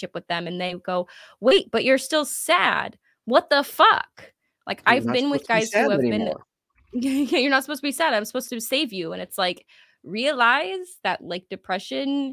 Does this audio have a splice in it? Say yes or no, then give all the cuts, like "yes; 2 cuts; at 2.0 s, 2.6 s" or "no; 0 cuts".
no; 0 cuts